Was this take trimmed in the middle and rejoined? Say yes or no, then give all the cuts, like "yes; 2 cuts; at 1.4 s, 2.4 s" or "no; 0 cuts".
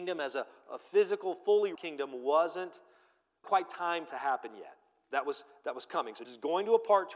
yes; 4 cuts; at 1.7 s, 3.4 s, 4.1 s, 6.2 s